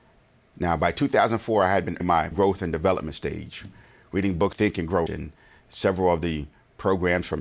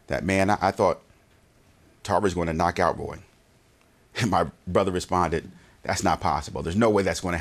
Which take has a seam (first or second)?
first